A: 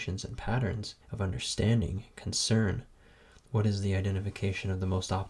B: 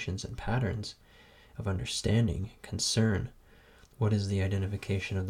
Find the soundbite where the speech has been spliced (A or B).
A